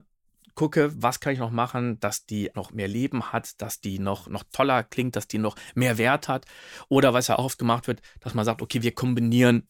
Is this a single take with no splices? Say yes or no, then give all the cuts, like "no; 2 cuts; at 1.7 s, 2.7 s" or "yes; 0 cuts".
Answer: no; 1 cut; at 2.5 s